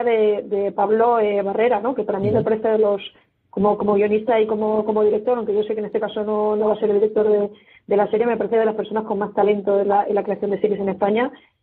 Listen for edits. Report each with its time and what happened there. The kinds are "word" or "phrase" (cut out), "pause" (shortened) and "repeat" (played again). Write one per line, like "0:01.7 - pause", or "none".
none